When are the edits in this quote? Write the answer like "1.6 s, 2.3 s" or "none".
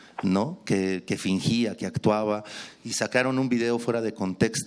none